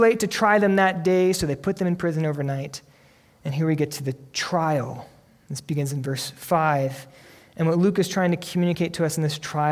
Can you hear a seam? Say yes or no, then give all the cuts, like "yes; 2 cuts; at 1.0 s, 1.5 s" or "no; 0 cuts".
no; 0 cuts